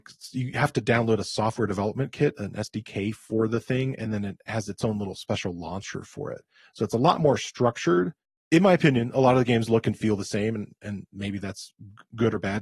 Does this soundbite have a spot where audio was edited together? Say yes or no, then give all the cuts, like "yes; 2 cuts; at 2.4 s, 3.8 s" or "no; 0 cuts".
no; 0 cuts